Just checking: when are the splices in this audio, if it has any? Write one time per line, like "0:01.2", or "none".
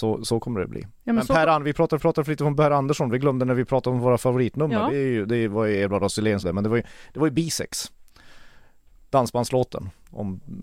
0:02.0
0:06.4

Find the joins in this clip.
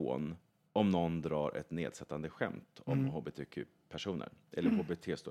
none

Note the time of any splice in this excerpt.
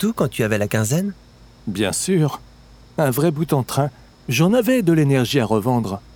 none

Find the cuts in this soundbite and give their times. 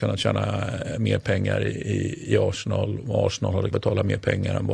0:01.7
0:03.7

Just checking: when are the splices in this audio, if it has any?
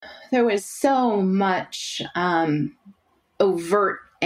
none

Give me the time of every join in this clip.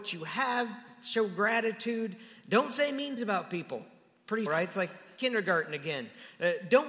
0:03.2
0:04.5

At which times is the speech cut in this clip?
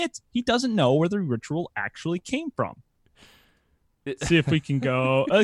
none

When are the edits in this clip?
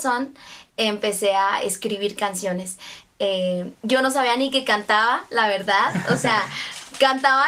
none

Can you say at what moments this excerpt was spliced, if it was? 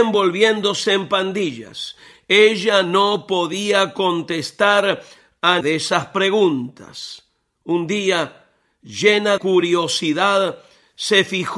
0:05.6
0:09.4

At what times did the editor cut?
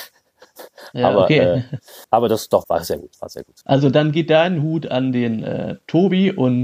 0:02.0
0:02.6
0:03.6

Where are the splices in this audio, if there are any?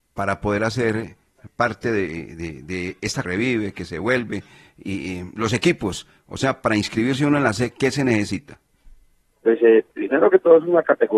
0:03.2

